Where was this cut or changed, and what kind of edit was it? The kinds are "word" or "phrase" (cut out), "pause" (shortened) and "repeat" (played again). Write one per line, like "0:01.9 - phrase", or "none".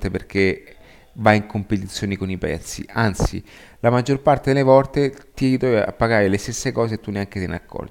none

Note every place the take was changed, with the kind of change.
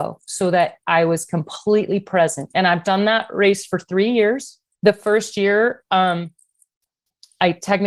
0:04.7 - pause

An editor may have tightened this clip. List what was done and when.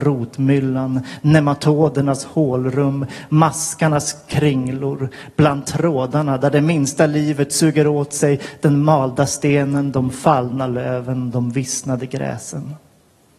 none

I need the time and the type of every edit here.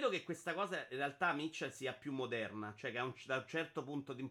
none

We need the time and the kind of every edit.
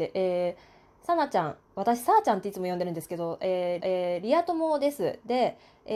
0:01.6 - pause
0:03.8 - repeat

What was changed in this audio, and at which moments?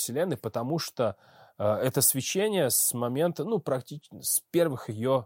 none

